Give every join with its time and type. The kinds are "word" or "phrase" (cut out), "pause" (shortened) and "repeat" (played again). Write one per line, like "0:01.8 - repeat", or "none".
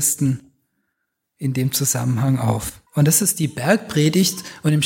0:02.9 - pause